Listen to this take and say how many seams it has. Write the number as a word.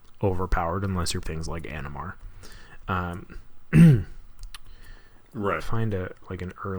two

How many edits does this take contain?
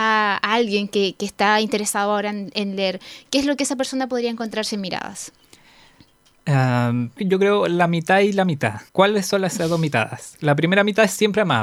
two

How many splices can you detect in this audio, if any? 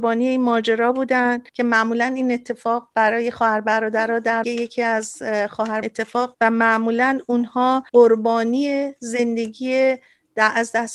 five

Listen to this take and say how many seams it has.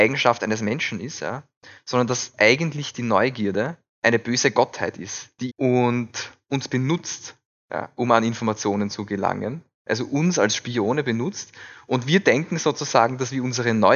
one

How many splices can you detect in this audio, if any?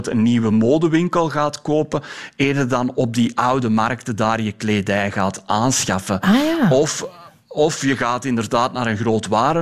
zero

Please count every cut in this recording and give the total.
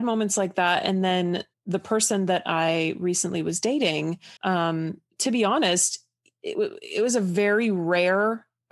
two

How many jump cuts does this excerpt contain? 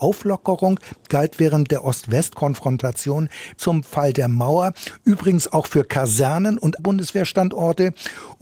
two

